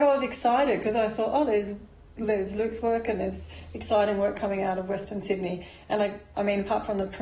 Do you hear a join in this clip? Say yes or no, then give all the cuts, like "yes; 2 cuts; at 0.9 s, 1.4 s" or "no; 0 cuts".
no; 0 cuts